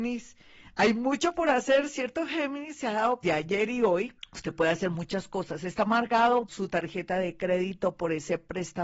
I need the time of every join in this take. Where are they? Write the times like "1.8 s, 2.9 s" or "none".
3.2 s, 4.2 s, 6.5 s